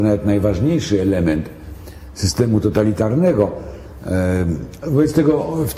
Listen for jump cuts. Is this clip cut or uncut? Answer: uncut